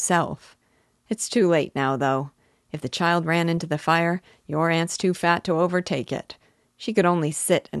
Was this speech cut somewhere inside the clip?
no; 0 cuts

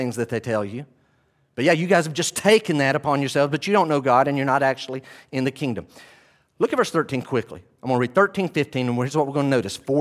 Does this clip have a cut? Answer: no; 0 cuts

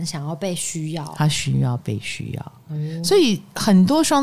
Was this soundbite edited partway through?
no; 0 cuts

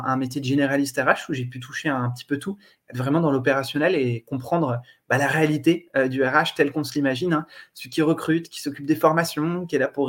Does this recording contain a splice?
no; 0 cuts

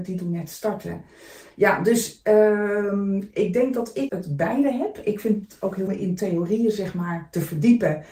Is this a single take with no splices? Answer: no; 2 cuts; at 4.1 s, 5.9 s

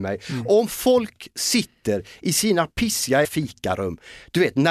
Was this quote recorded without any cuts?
no; 1 cut; at 3.2 s

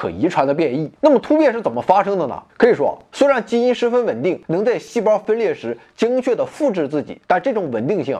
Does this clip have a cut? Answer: yes; 4 cuts; at 1.0 s, 2.5 s, 4.4 s, 7.2 s

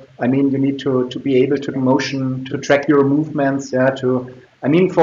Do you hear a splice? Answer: yes; 2 cuts; at 1.7 s, 2.5 s

